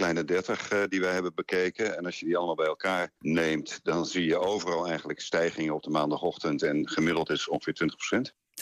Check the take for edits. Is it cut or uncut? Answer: cut